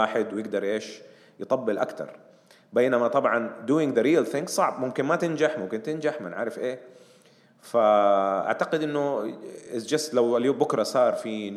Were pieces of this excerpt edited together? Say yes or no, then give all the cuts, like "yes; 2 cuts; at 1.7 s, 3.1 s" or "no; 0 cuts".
no; 0 cuts